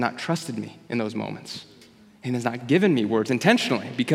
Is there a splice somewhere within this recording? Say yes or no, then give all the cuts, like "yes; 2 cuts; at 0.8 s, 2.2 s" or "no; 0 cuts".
no; 0 cuts